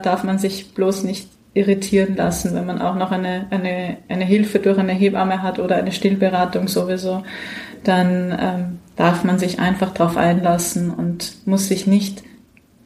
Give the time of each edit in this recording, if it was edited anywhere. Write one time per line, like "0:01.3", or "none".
none